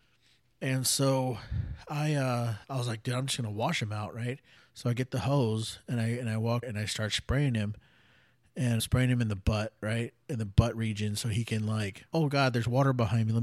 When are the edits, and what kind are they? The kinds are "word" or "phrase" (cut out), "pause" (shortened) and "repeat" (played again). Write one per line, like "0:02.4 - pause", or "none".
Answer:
0:02.6 - pause
0:04.6 - pause
0:06.6 - word
0:08.8 - word
0:12.1 - pause

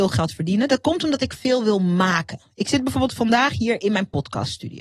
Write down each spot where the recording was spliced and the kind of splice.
none

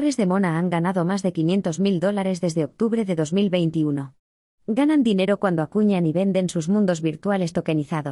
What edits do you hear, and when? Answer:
none

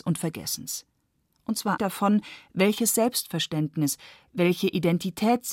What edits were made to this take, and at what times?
0:01.8 - word

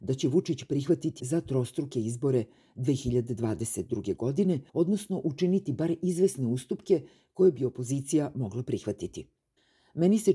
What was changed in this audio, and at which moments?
0:01.2 - phrase
0:04.7 - pause

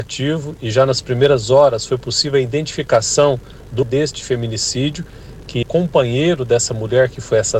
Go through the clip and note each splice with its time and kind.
0:03.8 - word
0:05.6 - word

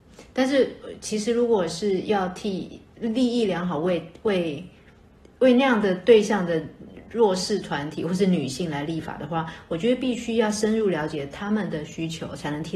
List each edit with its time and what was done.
0:05.1 - pause

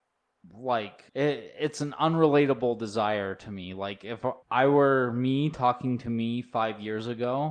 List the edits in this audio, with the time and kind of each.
0:01.1 - pause
0:04.4 - pause

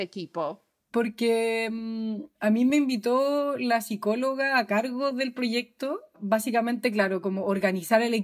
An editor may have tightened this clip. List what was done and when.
none

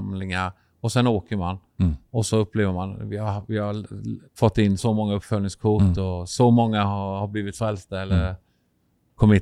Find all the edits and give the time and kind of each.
0:04.3 - pause
0:04.8 - word

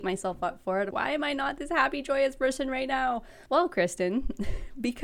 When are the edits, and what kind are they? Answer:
0:00.9 - word
0:03.5 - pause

